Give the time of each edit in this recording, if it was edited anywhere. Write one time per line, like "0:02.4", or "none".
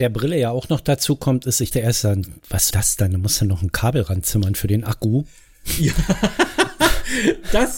0:01.7
0:02.7